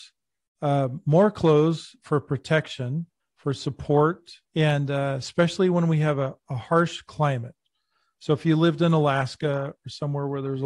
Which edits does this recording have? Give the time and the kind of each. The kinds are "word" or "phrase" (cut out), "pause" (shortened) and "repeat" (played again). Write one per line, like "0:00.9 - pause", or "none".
0:03.2 - pause
0:04.4 - pause